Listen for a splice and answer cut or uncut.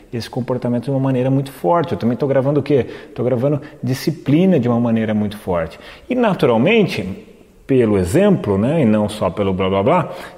uncut